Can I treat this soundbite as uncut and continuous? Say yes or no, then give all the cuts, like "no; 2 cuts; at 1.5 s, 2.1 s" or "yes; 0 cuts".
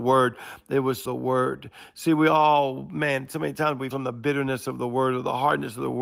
no; 2 cuts; at 1.1 s, 3.9 s